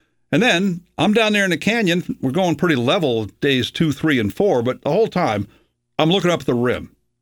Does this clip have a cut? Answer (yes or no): no